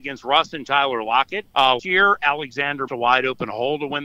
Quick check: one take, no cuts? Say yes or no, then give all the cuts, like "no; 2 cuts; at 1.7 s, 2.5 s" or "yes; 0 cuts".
no; 2 cuts; at 1.8 s, 2.9 s